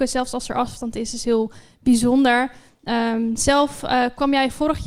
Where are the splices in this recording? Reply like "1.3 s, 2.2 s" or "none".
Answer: none